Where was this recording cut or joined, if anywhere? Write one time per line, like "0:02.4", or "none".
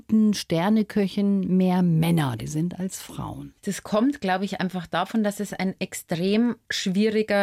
0:02.4